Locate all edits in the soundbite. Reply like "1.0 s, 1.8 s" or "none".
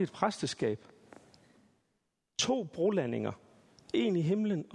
none